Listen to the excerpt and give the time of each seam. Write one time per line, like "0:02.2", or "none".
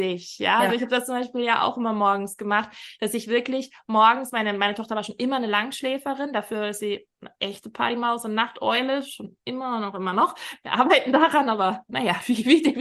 none